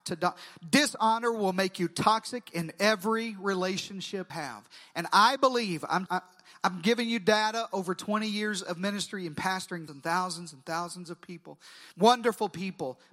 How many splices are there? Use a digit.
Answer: 4